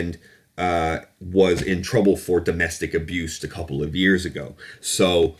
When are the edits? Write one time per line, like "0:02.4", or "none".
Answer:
0:03.4